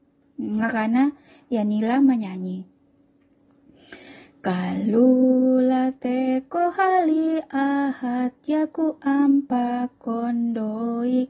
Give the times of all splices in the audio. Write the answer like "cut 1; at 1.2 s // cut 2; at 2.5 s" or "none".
none